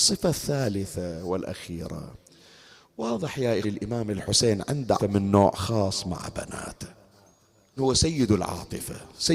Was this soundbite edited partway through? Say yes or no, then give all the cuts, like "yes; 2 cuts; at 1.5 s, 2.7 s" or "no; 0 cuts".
yes; 3 cuts; at 3.6 s, 5.0 s, 7.8 s